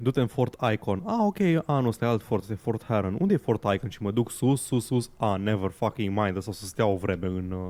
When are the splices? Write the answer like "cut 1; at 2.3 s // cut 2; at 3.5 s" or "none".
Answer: none